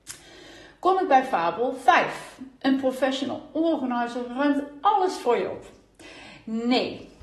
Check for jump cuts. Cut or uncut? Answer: uncut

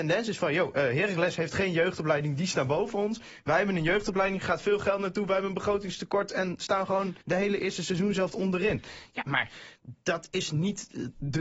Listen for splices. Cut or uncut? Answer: cut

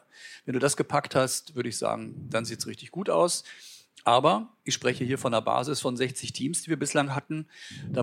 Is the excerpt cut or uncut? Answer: uncut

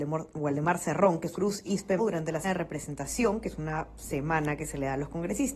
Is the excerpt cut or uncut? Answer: cut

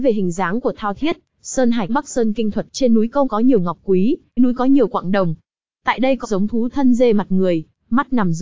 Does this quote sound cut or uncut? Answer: cut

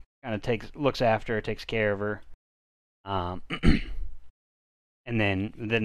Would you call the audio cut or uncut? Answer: uncut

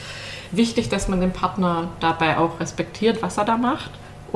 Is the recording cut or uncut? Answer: uncut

